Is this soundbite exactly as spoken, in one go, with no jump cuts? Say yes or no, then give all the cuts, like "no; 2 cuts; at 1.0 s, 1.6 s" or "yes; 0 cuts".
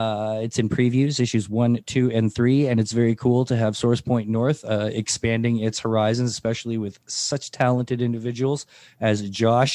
yes; 0 cuts